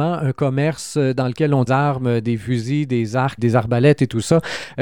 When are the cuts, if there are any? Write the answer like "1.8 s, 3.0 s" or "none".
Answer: 1.7 s, 3.4 s